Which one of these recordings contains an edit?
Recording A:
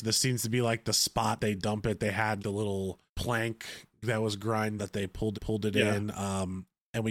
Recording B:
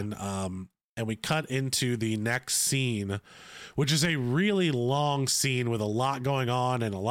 A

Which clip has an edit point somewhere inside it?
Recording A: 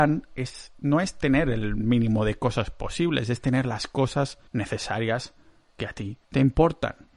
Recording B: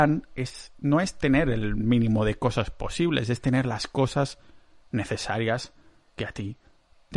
A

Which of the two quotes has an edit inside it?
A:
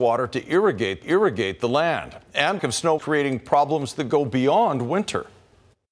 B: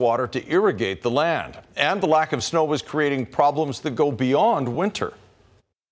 A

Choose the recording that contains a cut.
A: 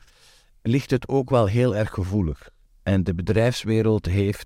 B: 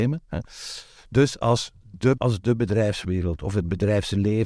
B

